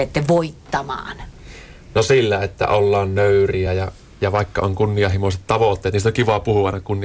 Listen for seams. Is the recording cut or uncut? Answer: uncut